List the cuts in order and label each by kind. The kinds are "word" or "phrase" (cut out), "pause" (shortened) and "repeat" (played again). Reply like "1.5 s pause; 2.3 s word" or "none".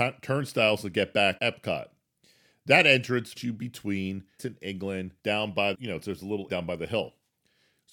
1.4 s word; 3.4 s word; 4.4 s word; 5.2 s pause; 5.7 s word; 6.5 s word